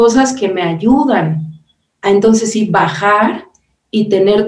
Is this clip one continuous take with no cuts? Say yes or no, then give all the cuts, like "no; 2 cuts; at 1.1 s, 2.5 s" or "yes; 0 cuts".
yes; 0 cuts